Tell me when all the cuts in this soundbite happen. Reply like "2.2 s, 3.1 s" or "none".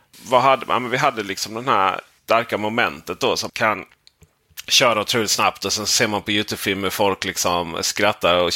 3.5 s